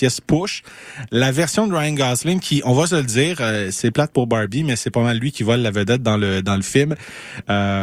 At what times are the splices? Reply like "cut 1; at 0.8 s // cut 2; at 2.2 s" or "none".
none